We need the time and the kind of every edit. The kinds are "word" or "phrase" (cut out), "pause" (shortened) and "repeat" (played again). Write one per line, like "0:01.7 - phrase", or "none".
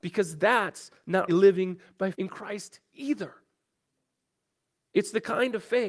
0:01.3 - word
0:02.1 - word

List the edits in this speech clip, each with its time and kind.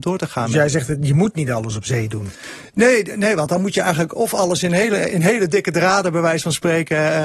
0:05.1 - word

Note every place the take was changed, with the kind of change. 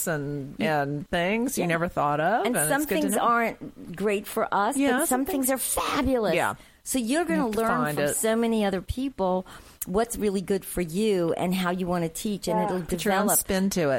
none

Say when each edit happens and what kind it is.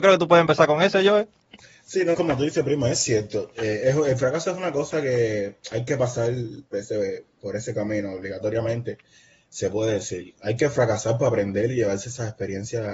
0:02.1 - word
0:06.7 - word

